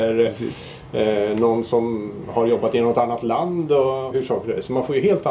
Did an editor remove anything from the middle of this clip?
yes; 1 cut; at 4.1 s

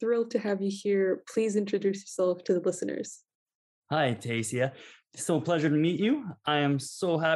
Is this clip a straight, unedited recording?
yes; 0 cuts

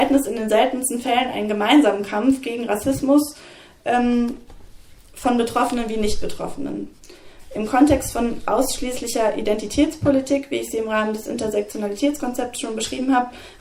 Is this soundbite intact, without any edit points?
yes; 0 cuts

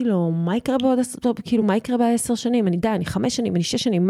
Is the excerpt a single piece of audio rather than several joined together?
yes; 0 cuts

